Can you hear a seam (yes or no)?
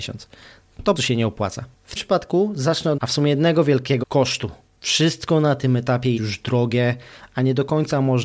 yes